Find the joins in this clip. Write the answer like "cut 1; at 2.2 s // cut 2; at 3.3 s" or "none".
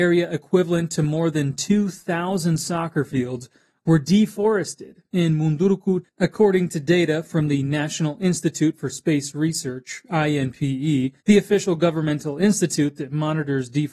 cut 1; at 6.0 s // cut 2; at 11.2 s